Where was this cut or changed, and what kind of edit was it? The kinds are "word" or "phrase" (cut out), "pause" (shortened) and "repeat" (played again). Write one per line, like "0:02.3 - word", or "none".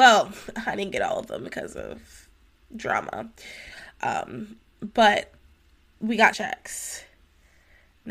0:06.3 - word